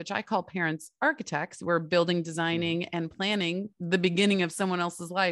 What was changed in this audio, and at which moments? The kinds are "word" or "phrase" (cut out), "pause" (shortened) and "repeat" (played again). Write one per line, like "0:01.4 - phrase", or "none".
none

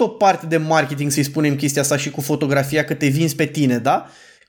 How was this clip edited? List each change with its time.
none

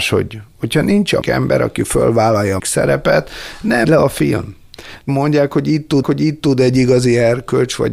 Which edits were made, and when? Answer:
0:01.2 - word
0:02.6 - word
0:03.8 - word
0:05.1 - phrase
0:06.0 - repeat

